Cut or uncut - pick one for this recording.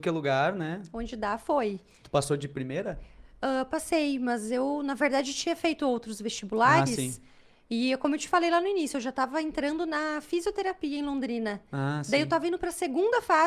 uncut